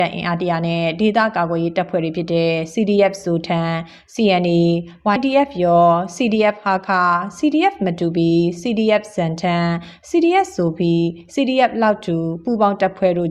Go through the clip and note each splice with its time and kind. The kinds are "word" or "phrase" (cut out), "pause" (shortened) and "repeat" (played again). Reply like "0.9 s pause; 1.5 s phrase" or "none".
5.2 s word